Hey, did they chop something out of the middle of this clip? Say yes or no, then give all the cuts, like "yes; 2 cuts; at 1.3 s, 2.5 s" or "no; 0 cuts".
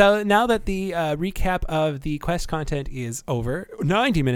no; 0 cuts